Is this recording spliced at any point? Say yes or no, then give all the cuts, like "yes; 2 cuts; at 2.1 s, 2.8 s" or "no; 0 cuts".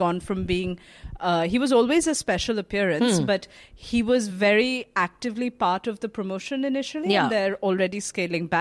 no; 0 cuts